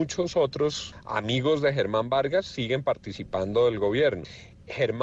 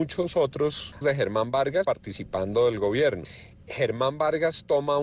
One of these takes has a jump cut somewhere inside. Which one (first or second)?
second